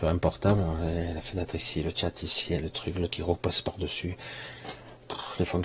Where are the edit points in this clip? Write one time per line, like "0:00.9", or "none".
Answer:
0:03.1